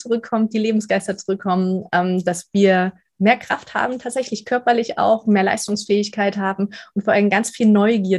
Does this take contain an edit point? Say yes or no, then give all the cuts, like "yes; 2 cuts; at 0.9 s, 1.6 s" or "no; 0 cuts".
no; 0 cuts